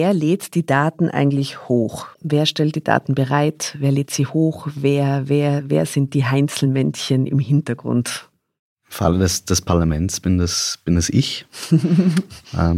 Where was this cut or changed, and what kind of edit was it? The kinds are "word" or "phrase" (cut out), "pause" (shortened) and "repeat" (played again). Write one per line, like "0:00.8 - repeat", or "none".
0:02.1 - pause
0:08.6 - pause